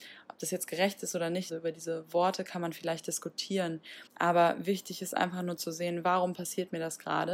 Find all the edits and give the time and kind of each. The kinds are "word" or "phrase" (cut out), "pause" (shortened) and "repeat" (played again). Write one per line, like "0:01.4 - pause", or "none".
0:01.5 - word
0:04.1 - pause